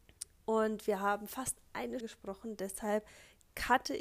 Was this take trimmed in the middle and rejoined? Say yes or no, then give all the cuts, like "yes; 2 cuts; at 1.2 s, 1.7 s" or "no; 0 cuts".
yes; 1 cut; at 2.0 s